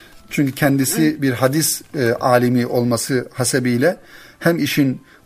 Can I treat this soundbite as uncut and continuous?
yes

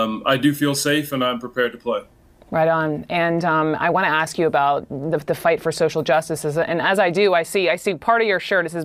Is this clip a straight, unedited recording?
yes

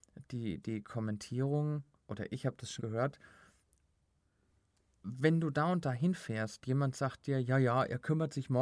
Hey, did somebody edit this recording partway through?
yes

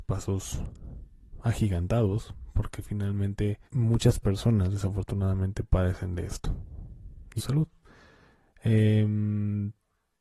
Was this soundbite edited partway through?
yes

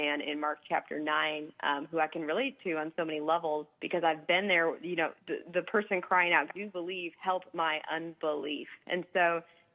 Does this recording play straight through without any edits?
no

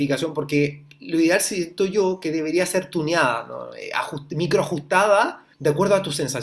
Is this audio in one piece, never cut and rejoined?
no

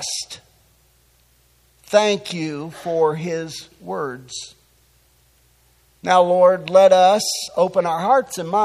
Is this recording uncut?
yes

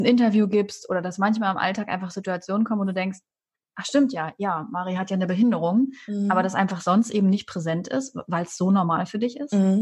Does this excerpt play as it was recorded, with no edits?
yes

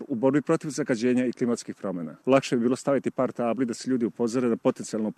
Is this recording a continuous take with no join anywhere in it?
yes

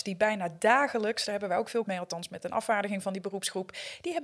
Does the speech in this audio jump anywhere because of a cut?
yes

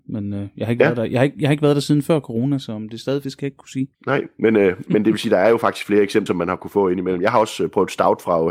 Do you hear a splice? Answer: yes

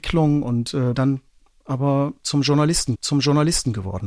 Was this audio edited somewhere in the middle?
yes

